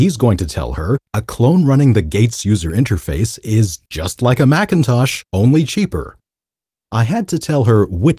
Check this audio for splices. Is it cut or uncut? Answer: uncut